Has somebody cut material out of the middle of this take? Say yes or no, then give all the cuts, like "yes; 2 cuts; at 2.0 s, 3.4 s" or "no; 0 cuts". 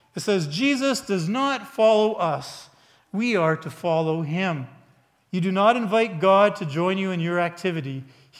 no; 0 cuts